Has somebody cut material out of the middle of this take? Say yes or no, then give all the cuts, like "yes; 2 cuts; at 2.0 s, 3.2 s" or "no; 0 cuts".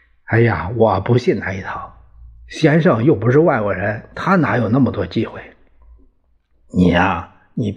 no; 0 cuts